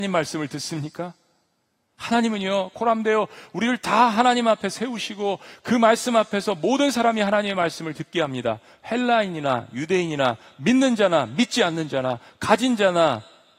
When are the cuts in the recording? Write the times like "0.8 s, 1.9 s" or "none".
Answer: none

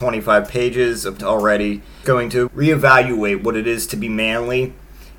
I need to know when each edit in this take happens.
1.2 s, 2.0 s, 2.5 s

